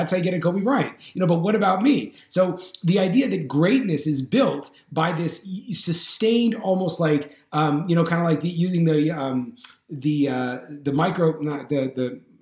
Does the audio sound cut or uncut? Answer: uncut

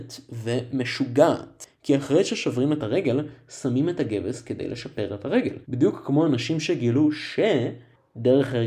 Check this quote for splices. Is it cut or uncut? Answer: cut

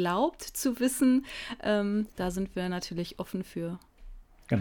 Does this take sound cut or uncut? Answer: uncut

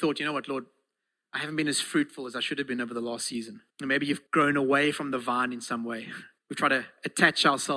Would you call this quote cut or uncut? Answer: cut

